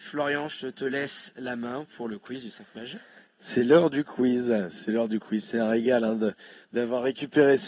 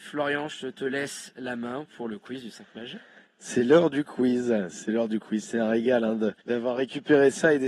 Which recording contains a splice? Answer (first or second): second